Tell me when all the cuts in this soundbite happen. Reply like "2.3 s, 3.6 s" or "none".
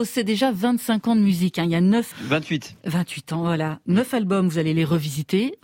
2.1 s